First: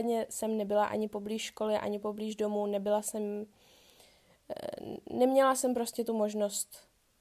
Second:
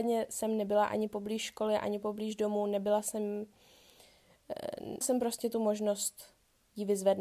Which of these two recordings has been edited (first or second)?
second